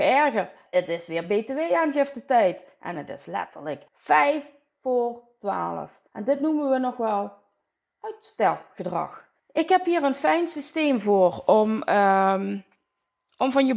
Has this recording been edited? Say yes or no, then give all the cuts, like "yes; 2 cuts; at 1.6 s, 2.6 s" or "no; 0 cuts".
yes; 3 cuts; at 3.9 s, 6.1 s, 9.4 s